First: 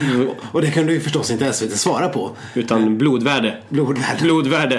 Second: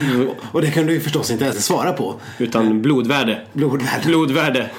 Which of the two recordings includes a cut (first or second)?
second